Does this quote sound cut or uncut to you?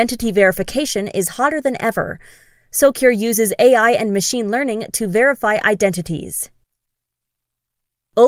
uncut